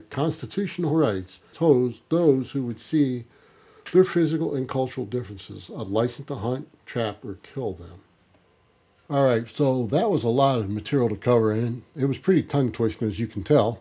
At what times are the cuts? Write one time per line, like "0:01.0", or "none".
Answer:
0:01.5
0:08.4